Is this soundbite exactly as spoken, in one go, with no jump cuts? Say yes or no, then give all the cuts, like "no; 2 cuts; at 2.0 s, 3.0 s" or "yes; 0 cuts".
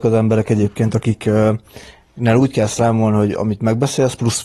yes; 0 cuts